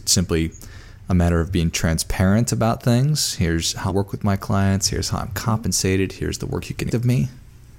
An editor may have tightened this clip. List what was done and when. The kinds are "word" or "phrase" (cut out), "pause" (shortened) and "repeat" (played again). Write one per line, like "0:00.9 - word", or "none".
0:03.9 - word
0:06.9 - word